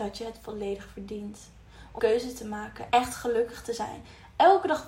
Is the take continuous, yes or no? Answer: no